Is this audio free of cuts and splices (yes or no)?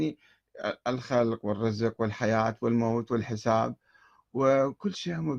yes